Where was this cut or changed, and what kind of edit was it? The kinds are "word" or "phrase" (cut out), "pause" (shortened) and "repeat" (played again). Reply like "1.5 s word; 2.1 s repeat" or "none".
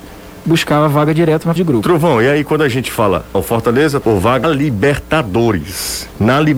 1.6 s word; 3.3 s word; 4.0 s word; 4.4 s word